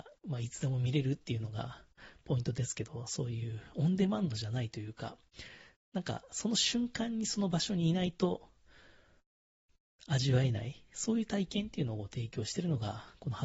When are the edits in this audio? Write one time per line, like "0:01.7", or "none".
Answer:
none